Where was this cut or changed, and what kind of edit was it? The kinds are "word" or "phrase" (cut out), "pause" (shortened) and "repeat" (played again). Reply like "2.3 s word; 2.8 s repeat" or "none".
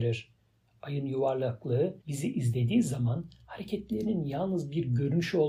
2.0 s pause